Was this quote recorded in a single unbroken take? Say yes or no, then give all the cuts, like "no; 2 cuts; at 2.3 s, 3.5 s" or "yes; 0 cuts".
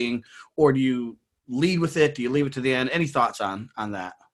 yes; 0 cuts